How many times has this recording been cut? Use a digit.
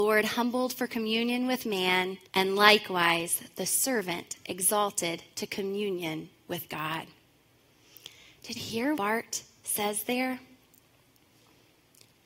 3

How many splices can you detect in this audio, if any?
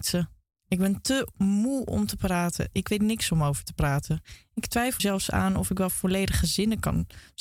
1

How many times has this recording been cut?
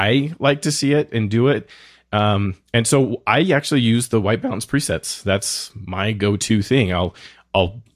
0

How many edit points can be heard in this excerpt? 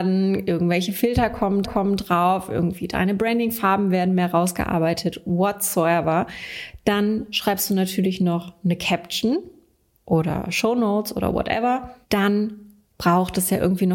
1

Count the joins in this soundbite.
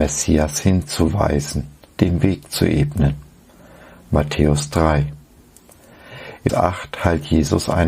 2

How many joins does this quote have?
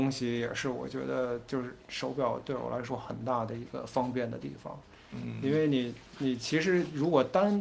0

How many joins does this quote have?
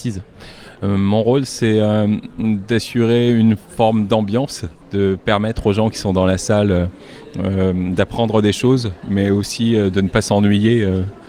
1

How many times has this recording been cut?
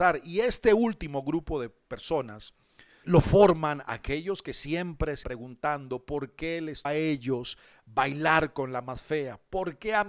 3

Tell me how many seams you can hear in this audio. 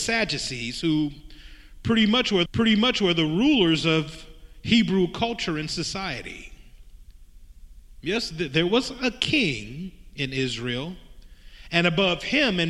1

